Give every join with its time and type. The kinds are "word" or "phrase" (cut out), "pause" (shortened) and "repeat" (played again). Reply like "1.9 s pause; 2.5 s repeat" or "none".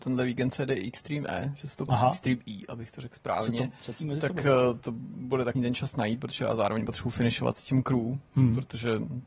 1.9 s word; 4.0 s word; 5.5 s phrase